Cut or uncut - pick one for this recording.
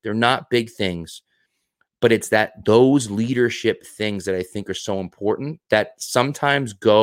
uncut